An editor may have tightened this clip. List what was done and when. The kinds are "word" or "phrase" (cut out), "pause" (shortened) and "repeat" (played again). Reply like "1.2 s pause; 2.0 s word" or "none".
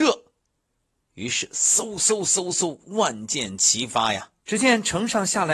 4.4 s pause